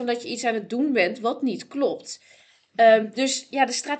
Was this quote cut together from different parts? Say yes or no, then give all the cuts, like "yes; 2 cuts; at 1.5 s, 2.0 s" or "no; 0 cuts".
no; 0 cuts